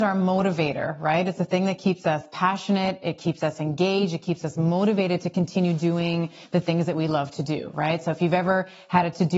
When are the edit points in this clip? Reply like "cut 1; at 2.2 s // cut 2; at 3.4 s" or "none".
none

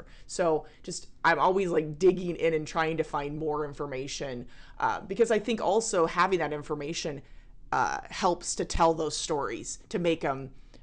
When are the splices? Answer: none

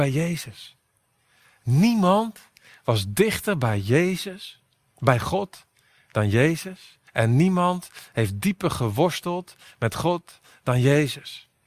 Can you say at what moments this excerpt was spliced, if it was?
cut 1; at 7.1 s

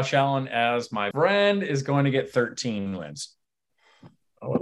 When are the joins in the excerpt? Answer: cut 1; at 1.1 s

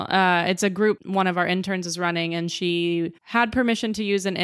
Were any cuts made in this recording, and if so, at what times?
cut 1; at 1.0 s // cut 2; at 3.2 s

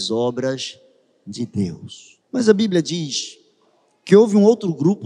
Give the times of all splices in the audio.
cut 1; at 2.2 s

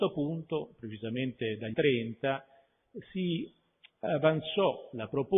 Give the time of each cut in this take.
cut 1; at 1.7 s

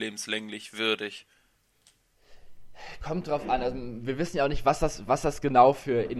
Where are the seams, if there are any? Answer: none

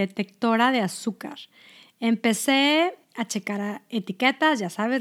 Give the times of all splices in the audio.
cut 1; at 3.0 s

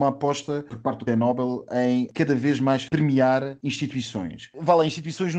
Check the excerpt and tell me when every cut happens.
cut 1; at 1.1 s // cut 2; at 2.9 s

